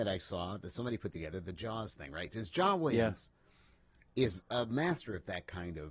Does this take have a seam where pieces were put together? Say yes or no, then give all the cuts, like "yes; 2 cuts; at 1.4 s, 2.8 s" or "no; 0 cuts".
no; 0 cuts